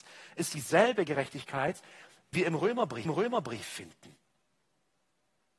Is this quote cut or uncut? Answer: cut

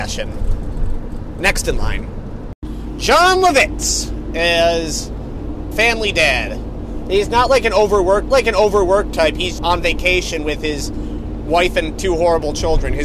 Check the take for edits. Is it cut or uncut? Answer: cut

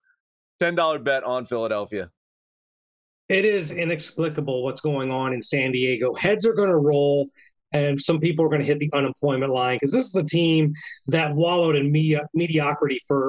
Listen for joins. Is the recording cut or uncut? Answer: uncut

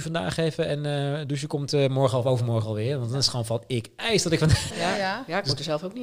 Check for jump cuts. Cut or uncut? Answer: cut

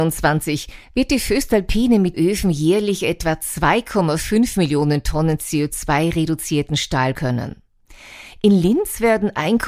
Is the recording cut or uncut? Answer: cut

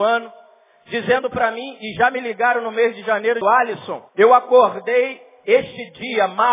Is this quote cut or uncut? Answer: cut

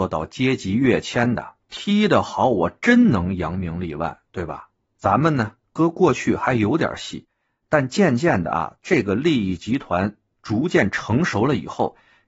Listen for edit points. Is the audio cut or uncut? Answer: uncut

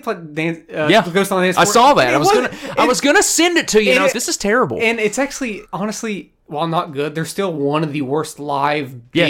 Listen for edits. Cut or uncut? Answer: cut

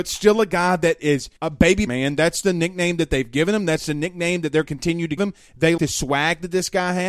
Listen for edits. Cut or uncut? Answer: cut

